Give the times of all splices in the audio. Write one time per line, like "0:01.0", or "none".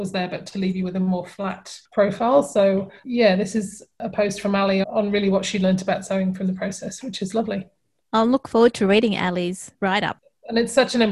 0:03.0
0:04.8
0:09.7